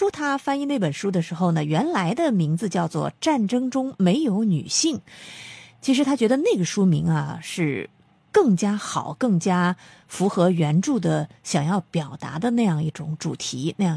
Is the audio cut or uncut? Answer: uncut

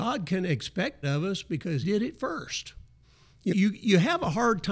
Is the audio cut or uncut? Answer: cut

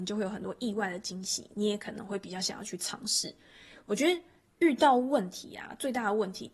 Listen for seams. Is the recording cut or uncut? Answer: uncut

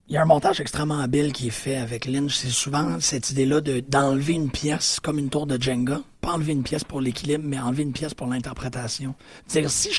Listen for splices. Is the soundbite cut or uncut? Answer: uncut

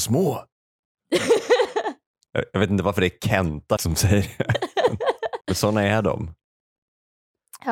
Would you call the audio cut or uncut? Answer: cut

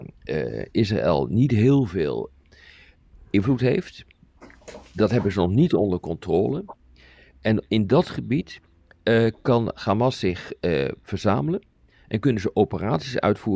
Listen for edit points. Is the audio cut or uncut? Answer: uncut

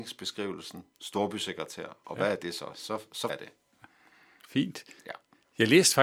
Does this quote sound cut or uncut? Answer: cut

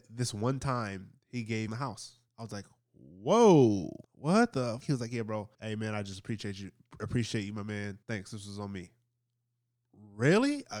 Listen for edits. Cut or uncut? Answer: cut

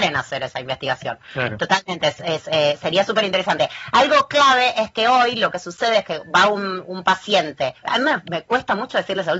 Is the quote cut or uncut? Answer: cut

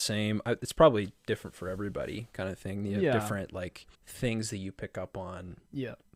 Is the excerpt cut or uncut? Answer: cut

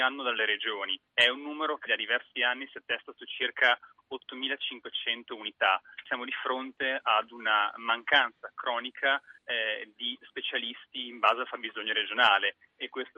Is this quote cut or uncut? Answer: cut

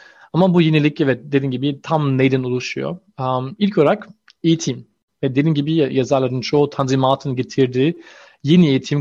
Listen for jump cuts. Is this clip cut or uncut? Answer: uncut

